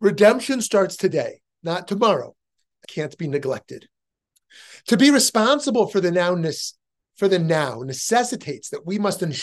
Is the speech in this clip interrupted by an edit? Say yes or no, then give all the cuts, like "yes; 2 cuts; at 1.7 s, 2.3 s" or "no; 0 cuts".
yes; 1 cut; at 2.8 s